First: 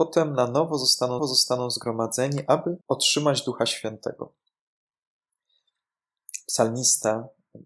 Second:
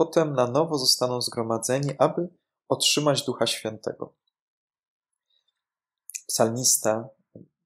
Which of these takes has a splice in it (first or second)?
first